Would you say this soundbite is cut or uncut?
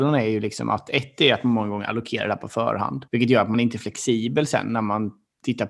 cut